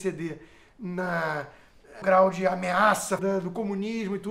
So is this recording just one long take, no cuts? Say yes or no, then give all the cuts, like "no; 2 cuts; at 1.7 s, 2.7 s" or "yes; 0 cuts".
no; 2 cuts; at 2.0 s, 3.2 s